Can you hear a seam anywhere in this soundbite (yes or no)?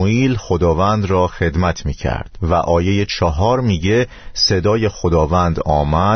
no